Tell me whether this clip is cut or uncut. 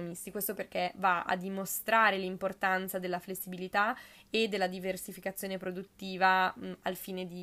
uncut